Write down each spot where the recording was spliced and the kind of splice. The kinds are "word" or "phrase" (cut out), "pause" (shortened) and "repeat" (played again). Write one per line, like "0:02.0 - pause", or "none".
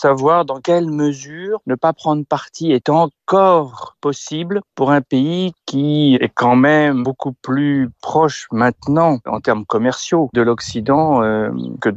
none

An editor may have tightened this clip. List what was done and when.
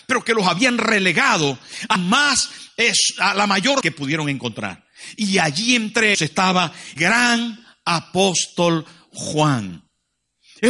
0:02.0 - word
0:03.8 - word
0:06.1 - word
0:07.0 - word

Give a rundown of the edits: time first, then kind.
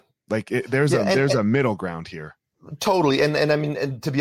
none

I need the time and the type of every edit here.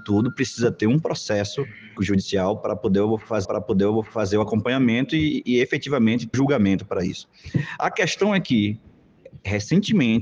0:02.0 - word
0:03.4 - repeat
0:06.3 - word

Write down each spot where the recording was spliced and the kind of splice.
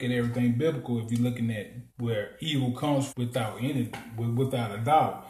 0:01.9 - pause
0:03.1 - word

